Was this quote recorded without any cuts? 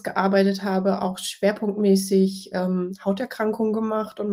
yes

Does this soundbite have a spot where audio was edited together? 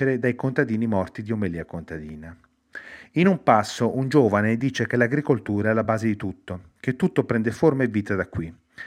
no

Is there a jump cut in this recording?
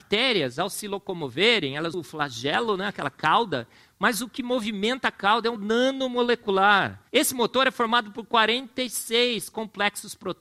yes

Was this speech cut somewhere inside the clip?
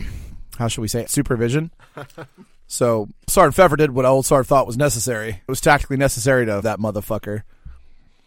yes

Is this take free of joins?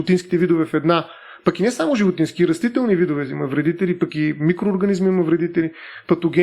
yes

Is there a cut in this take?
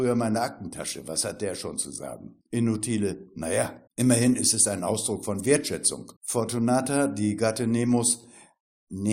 yes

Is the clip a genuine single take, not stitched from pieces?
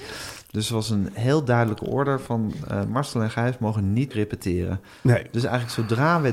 no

